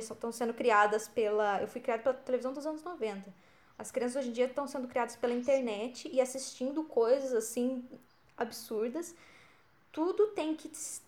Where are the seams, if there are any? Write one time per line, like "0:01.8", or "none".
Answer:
none